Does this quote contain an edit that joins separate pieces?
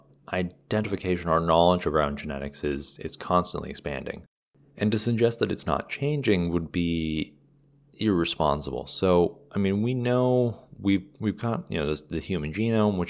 no; 0 cuts

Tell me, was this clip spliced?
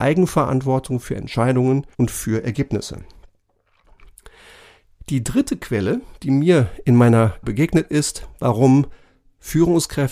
yes; 2 cuts; at 1.9 s, 7.4 s

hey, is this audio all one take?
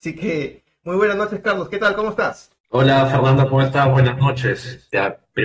no; 1 cut; at 2.6 s

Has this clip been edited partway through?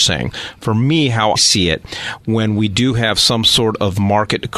yes; 1 cut; at 1.4 s

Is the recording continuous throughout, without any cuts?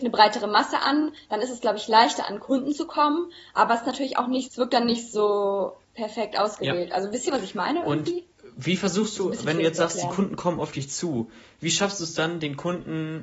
no; 3 cuts; at 4.5 s, 5.8 s, 8.3 s

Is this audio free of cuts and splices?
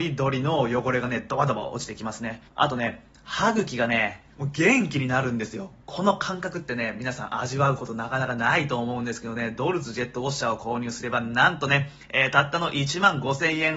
no; 2 cuts; at 2.5 s, 4.3 s

